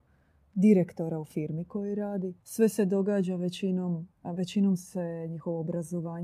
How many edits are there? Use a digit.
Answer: 2